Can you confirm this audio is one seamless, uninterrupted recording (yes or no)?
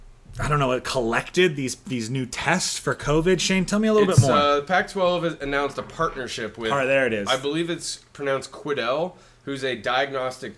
yes